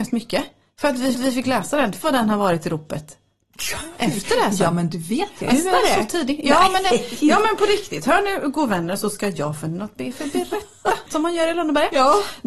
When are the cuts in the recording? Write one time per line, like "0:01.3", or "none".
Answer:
0:01.1
0:02.0
0:05.5
0:11.1